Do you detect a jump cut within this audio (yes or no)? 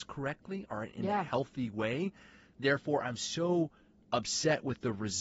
no